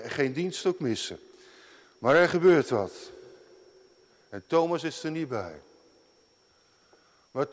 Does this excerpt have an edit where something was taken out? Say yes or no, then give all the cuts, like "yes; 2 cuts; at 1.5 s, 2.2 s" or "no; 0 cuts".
no; 0 cuts